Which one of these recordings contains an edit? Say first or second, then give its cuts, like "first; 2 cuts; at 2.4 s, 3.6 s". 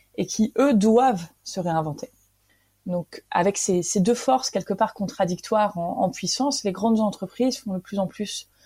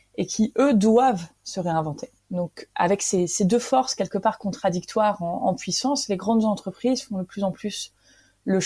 second; 1 cut; at 2.2 s